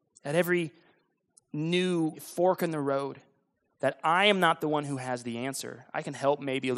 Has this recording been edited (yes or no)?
yes